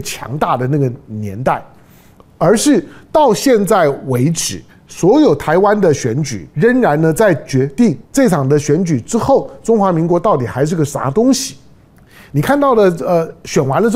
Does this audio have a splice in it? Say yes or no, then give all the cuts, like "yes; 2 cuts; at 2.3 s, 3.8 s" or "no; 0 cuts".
yes; 4 cuts; at 4.7 s, 6.5 s, 8.0 s, 11.9 s